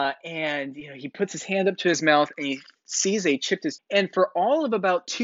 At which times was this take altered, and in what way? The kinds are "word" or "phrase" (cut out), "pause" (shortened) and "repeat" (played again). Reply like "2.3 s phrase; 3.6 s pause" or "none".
3.8 s word